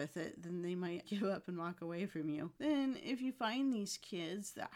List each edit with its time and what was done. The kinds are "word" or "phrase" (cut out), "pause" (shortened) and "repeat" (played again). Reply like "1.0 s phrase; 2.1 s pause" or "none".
1.0 s word; 2.5 s pause